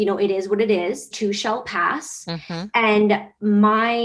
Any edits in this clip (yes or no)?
yes